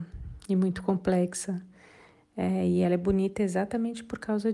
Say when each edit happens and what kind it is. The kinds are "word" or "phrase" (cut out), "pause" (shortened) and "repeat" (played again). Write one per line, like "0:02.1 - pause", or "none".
none